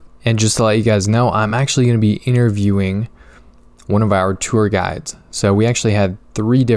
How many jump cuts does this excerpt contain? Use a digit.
0